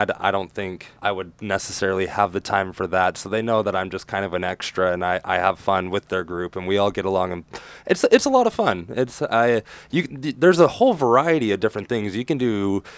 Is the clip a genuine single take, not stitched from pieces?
no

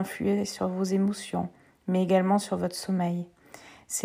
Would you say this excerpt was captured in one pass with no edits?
yes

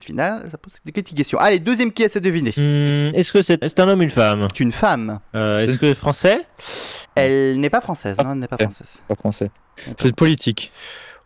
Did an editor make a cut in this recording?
yes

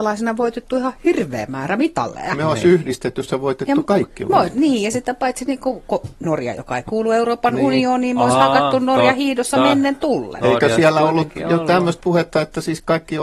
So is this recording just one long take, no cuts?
yes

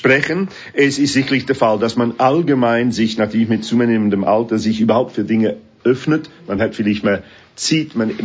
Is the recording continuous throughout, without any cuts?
yes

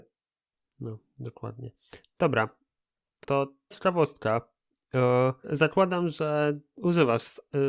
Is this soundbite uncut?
no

